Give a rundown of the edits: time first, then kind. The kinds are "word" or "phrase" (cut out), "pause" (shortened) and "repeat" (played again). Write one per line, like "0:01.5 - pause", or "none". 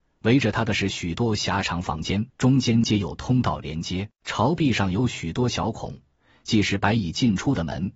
0:02.3 - pause
0:04.2 - pause